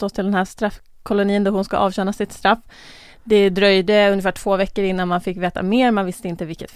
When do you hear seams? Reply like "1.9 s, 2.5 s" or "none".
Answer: none